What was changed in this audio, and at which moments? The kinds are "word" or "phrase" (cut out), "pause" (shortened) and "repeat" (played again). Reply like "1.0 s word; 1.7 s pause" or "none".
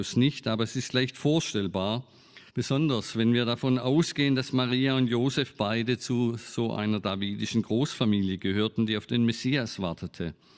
2.5 s pause